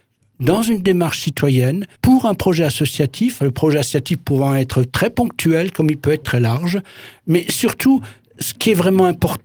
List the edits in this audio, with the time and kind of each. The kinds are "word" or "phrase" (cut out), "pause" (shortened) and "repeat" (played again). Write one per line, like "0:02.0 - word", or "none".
0:02.0 - pause
0:06.2 - word